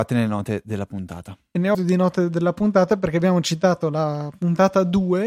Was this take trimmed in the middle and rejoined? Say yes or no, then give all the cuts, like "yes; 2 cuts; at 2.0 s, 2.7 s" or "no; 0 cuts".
yes; 1 cut; at 1.7 s